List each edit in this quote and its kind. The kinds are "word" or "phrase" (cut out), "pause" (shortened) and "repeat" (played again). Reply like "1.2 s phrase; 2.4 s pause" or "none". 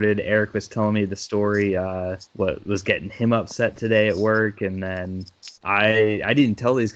2.3 s pause; 5.6 s pause